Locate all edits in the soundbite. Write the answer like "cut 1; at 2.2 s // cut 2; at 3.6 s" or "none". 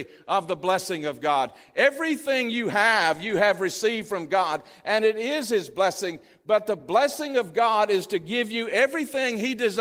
none